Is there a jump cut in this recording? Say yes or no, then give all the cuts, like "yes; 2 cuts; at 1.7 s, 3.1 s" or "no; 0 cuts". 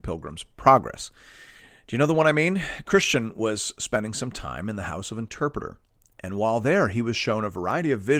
no; 0 cuts